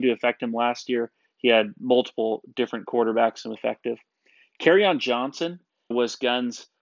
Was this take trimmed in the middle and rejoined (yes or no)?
yes